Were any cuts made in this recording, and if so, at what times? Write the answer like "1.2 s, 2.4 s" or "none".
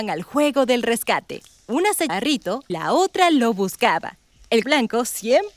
2.1 s, 2.7 s, 4.6 s